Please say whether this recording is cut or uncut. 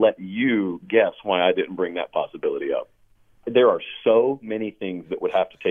uncut